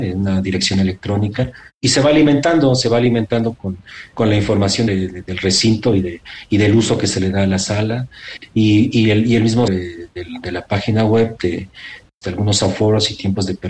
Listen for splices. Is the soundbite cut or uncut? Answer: cut